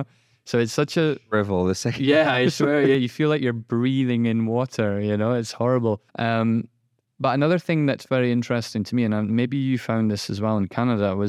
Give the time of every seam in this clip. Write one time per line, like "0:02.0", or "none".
0:06.1